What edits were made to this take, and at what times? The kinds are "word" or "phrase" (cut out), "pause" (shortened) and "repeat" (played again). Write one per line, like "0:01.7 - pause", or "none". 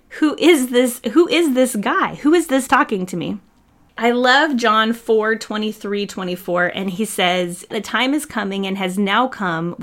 0:02.7 - phrase
0:07.7 - word